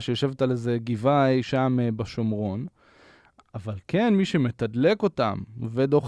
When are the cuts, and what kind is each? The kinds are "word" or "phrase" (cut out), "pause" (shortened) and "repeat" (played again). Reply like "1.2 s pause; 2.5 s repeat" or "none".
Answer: none